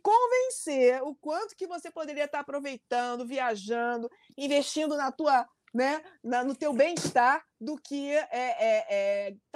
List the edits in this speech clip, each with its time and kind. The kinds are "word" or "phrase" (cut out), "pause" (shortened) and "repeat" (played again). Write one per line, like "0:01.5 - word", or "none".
none